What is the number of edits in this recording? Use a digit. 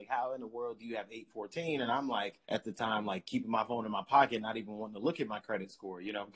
1